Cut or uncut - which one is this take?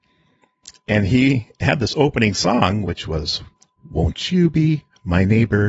cut